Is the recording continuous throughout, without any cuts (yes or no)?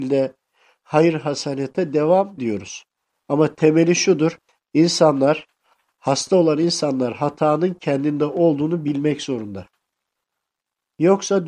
no